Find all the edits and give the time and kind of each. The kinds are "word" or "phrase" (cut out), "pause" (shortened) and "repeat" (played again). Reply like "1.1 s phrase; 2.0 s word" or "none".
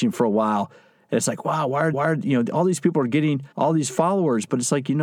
1.9 s repeat; 3.5 s pause